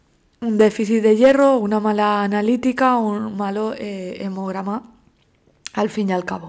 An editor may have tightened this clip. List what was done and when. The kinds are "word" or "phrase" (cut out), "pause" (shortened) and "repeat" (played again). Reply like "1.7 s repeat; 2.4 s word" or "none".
none